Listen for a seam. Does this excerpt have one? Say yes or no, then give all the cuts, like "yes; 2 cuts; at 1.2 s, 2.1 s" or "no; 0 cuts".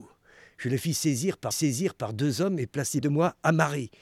yes; 2 cuts; at 1.5 s, 3.0 s